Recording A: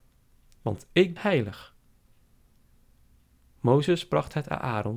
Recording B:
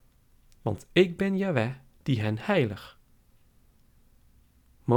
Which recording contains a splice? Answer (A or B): A